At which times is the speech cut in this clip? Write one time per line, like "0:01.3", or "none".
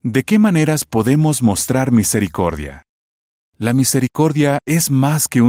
0:03.0